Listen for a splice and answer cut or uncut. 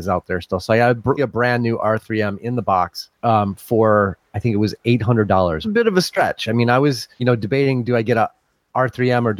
cut